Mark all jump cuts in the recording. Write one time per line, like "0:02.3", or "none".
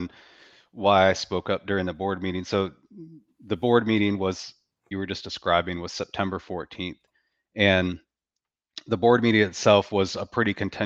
0:04.9